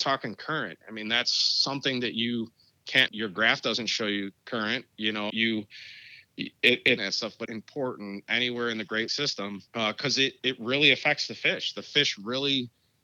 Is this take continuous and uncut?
no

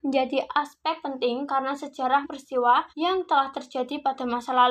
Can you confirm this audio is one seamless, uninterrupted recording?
no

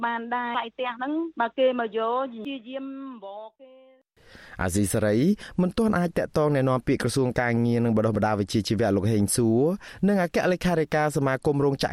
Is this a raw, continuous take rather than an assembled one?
yes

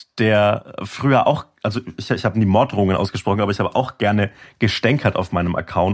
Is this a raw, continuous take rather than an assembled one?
yes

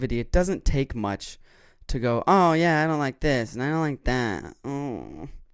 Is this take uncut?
yes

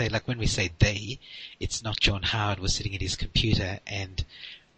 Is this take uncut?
no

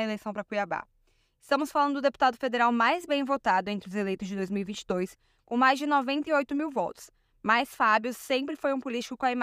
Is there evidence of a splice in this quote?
no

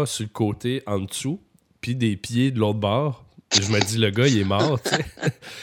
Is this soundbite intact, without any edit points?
yes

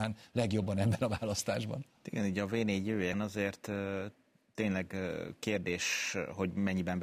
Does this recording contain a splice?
yes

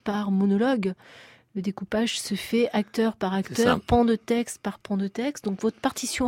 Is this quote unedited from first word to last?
yes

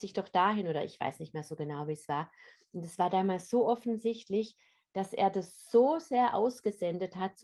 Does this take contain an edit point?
no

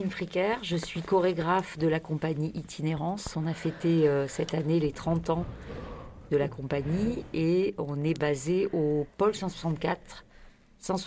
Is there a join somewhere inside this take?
no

